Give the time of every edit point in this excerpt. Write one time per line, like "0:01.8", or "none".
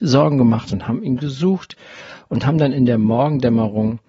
none